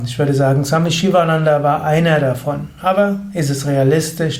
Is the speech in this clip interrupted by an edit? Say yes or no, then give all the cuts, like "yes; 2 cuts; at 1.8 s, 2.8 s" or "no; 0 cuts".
no; 0 cuts